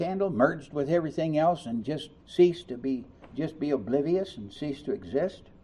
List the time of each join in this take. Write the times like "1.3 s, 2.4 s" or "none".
2.2 s, 3.2 s